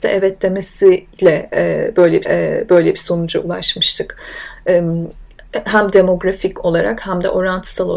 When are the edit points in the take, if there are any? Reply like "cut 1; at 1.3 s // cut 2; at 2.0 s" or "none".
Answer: cut 1; at 2.2 s